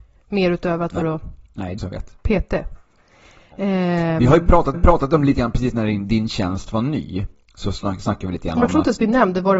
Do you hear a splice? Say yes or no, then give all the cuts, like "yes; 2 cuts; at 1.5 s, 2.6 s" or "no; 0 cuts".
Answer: yes; 3 cuts; at 1.0 s, 1.8 s, 4.7 s